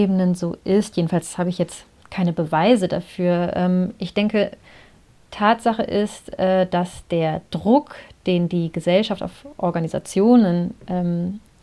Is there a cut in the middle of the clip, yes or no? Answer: no